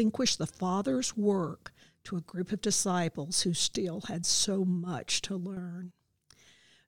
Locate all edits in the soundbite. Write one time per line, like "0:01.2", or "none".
none